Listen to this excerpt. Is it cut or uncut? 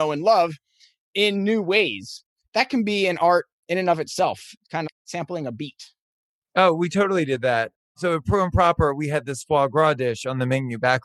cut